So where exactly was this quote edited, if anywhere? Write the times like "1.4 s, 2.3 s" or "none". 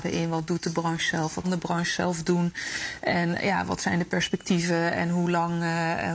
1.4 s